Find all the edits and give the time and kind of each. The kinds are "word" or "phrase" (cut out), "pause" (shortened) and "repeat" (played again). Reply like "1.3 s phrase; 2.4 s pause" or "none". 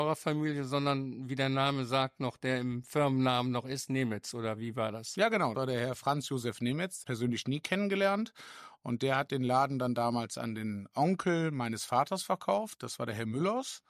5.5 s word; 7.0 s phrase